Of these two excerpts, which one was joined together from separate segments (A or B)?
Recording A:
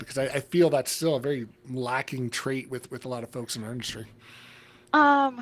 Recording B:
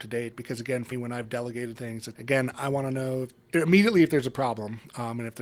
B